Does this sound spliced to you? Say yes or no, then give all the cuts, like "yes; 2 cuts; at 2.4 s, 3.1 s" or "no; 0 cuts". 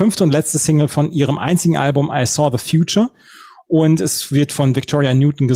no; 0 cuts